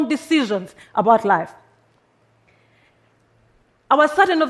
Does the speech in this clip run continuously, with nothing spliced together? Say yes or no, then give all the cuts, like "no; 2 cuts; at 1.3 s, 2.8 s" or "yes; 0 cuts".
yes; 0 cuts